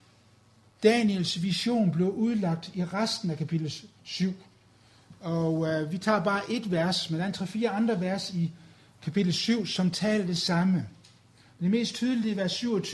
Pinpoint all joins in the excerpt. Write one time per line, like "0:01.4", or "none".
none

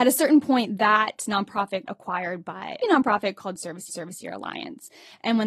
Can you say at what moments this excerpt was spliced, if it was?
0:01.9
0:02.8
0:03.9

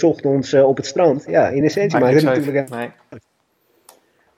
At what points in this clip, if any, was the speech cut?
none

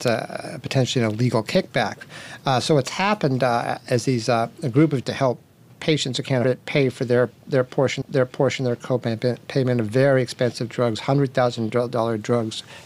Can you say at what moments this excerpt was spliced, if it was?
0:05.0
0:06.4
0:08.0

